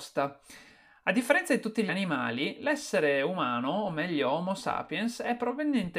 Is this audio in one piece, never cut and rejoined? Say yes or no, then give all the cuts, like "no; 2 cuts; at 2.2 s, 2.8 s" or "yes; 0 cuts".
no; 1 cut; at 1.9 s